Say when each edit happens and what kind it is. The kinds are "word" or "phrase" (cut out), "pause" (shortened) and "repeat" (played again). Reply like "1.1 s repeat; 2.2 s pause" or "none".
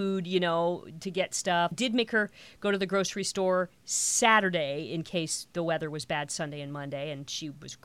1.7 s word